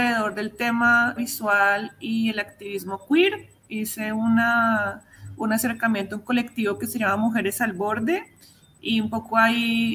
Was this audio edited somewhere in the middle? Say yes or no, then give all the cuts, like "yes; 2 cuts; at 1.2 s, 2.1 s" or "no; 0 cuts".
yes; 1 cut; at 1.2 s